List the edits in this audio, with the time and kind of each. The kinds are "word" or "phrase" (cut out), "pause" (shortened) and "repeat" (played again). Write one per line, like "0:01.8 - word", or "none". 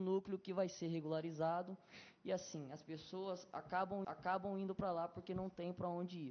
0:04.0 - repeat